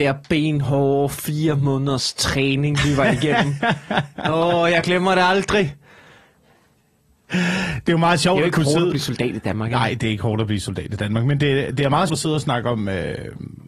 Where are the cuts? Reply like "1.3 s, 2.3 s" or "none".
12.1 s